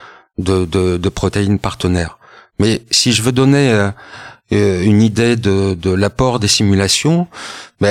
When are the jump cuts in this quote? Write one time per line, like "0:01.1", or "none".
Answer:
none

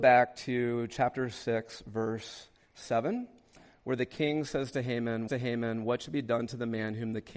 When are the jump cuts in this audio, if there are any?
0:05.3

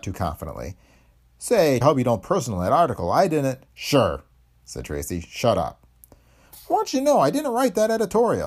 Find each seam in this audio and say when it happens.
0:01.8
0:02.2
0:03.7

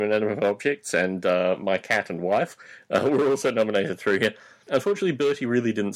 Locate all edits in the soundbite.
none

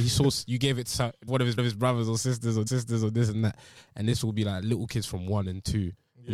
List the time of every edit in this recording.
0:01.3
0:01.6
0:02.7

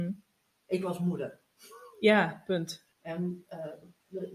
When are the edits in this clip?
0:02.9

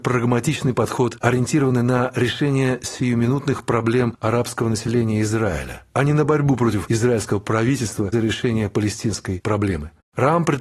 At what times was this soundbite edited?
0:08.1

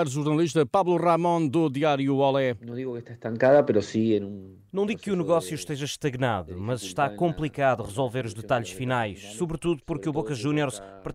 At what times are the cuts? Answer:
none

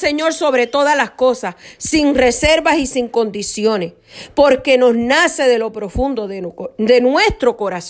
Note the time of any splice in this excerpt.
none

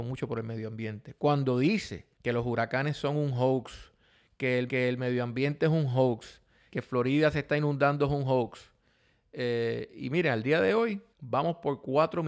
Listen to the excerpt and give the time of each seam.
0:02.1
0:04.7
0:06.7
0:11.1

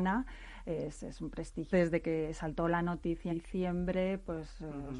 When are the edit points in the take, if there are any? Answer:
0:01.7
0:03.3

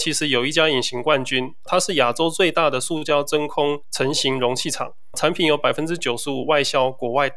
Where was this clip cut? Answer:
0:05.1

